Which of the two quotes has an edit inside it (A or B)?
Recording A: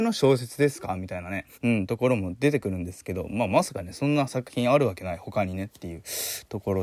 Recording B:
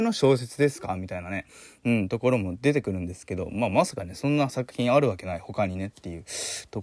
A